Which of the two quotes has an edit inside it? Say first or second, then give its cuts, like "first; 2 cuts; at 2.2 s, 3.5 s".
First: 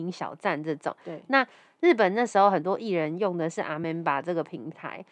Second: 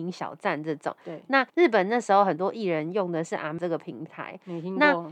second; 2 cuts; at 1.5 s, 3.6 s